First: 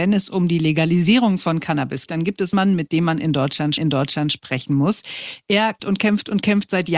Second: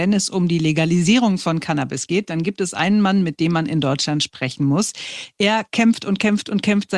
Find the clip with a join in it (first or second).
first